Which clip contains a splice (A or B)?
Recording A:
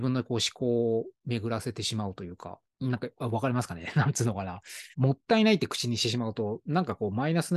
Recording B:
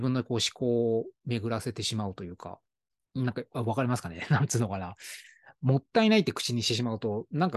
A